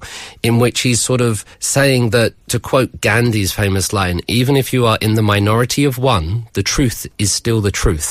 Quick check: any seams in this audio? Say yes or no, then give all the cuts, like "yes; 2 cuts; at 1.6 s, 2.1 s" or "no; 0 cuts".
yes; 2 cuts; at 1.5 s, 2.4 s